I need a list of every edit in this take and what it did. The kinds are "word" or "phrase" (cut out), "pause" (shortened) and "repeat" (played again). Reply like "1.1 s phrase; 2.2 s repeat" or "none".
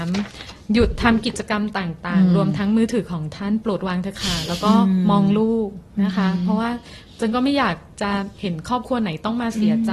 8.3 s pause

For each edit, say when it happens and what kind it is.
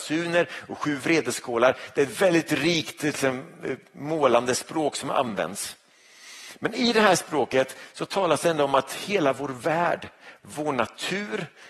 none

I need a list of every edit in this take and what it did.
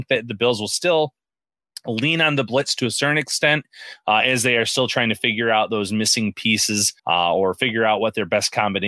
7.0 s pause

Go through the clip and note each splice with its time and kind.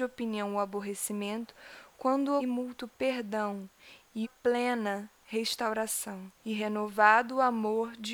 2.4 s phrase; 4.2 s word; 6.4 s pause

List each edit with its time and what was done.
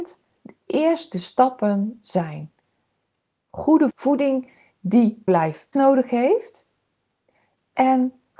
3.9 s word; 5.3 s word; 5.7 s word

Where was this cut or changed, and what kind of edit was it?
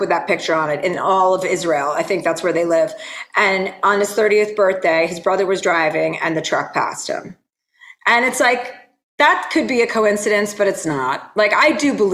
none

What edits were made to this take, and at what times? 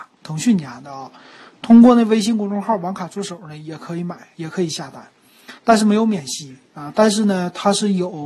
5.6 s pause

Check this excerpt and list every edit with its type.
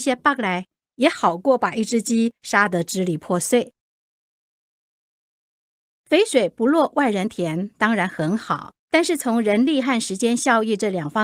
8.8 s pause

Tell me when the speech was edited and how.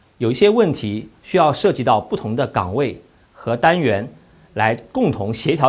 none

